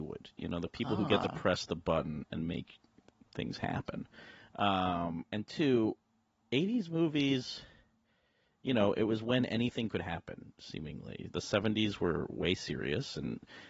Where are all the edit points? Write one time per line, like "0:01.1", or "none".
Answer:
none